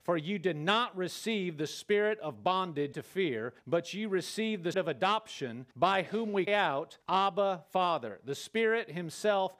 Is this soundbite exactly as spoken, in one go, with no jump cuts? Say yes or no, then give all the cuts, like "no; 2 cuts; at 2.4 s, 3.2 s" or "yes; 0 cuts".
no; 6 cuts; at 2.9 s, 3.6 s, 4.7 s, 5.7 s, 6.5 s, 7.0 s